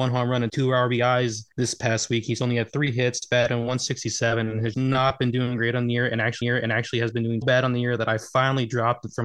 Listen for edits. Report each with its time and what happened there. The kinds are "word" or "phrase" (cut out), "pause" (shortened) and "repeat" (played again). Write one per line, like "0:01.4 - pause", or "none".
0:04.7 - word
0:06.4 - repeat
0:07.4 - word